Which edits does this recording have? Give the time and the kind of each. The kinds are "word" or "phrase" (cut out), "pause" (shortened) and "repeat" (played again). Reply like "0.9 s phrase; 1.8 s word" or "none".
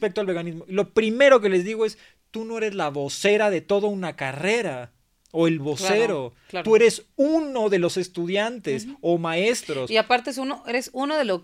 none